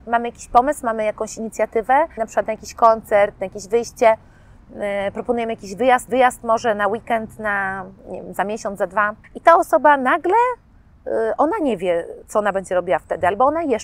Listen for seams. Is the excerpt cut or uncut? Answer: cut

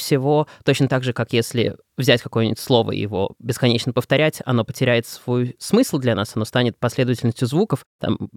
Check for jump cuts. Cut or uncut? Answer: uncut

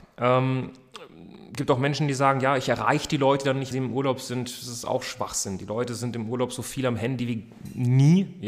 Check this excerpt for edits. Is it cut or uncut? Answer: cut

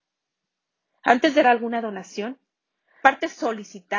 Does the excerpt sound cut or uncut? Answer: cut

